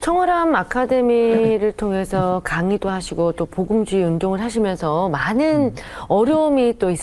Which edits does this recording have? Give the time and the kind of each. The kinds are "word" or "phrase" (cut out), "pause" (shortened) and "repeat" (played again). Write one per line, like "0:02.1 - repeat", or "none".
none